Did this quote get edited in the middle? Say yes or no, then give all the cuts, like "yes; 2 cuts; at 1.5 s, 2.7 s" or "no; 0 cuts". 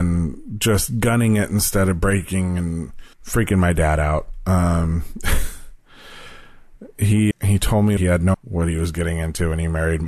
yes; 5 cuts; at 3.1 s, 5.8 s, 7.3 s, 8.0 s, 8.3 s